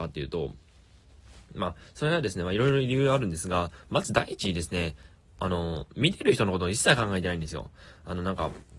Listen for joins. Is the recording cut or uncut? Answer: uncut